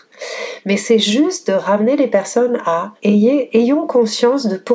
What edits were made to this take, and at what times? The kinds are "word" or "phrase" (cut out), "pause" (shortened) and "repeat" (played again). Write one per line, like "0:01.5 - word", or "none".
0:03.0 - pause